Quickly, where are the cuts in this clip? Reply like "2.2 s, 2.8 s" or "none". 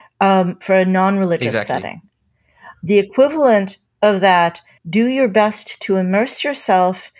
4.8 s

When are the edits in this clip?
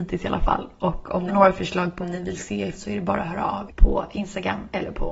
1.3 s, 2.0 s, 2.7 s, 3.7 s

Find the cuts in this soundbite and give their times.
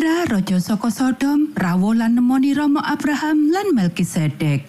none

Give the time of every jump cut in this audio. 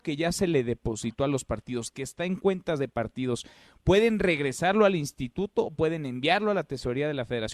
none

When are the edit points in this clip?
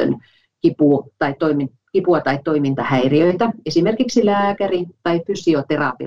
none

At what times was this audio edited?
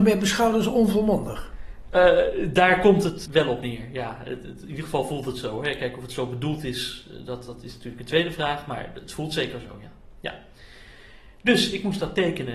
3.3 s

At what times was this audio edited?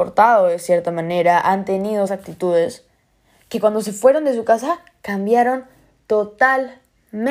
2.1 s

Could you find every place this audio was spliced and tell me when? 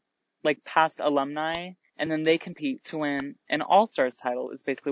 none

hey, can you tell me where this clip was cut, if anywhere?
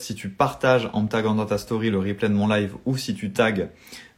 none

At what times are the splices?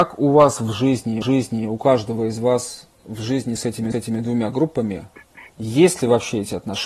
1.2 s, 3.6 s, 3.9 s, 5.5 s

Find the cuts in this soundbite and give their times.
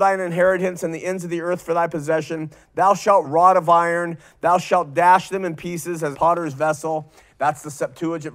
3.2 s, 6.1 s

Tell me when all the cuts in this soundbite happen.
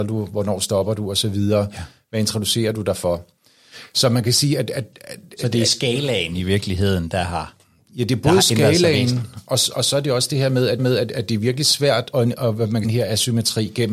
10.8 s, 12.1 s, 12.8 s

